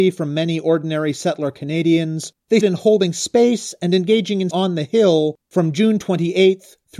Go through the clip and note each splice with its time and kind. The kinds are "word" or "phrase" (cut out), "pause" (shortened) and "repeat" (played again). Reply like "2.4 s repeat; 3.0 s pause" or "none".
2.6 s word; 4.5 s word